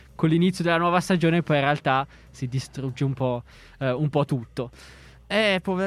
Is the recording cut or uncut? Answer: uncut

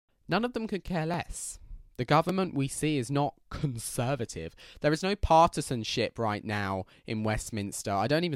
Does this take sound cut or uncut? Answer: uncut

